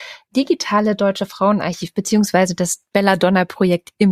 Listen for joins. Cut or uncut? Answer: uncut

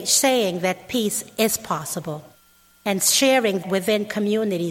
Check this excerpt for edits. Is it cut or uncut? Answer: cut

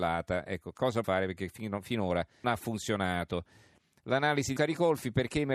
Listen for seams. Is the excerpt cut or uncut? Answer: cut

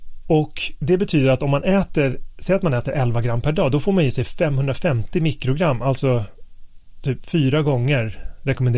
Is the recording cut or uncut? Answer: uncut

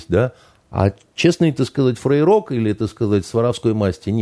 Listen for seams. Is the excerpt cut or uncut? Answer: uncut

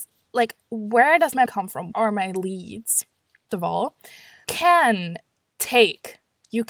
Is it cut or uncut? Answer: cut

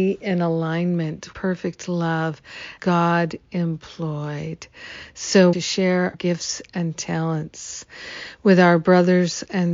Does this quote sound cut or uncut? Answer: cut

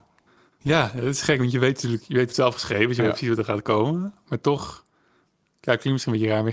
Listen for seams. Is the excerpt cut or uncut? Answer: cut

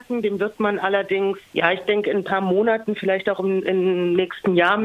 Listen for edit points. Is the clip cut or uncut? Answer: uncut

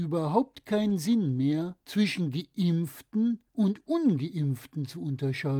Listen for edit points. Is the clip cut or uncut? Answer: cut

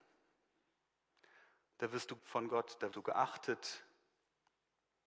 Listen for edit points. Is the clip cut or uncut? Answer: cut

